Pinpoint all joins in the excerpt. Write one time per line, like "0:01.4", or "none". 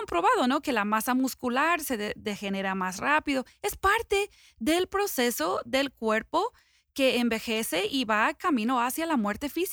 none